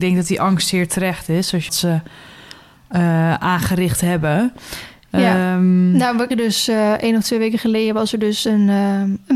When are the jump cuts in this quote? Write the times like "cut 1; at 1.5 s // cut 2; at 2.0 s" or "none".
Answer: cut 1; at 1.7 s // cut 2; at 6.3 s